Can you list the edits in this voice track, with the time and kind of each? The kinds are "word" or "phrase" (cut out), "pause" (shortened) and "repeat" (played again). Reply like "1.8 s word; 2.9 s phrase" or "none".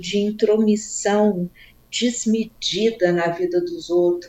none